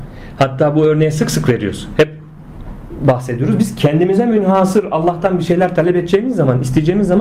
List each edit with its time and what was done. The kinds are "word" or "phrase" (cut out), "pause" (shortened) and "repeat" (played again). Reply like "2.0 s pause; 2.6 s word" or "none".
none